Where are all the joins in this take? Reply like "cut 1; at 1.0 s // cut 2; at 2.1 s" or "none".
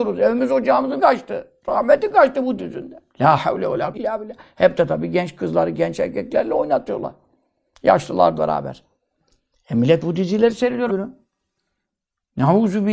cut 1; at 1.0 s // cut 2; at 2.6 s // cut 3; at 3.1 s // cut 4; at 3.9 s // cut 5; at 8.4 s // cut 6; at 10.9 s

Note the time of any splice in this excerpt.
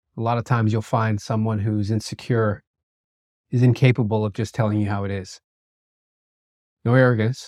none

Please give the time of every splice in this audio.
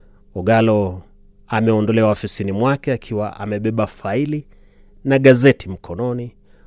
none

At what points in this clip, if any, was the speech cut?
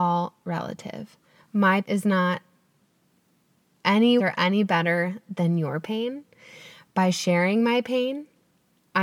cut 1; at 1.8 s // cut 2; at 4.2 s

